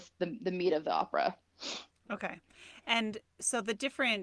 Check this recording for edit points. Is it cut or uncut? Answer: cut